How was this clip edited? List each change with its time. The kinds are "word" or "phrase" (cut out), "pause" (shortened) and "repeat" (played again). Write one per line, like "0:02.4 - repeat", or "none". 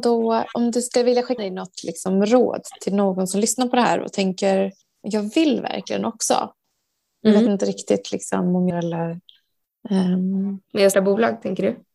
0:01.4 - word
0:04.8 - pause
0:08.7 - phrase
0:10.9 - word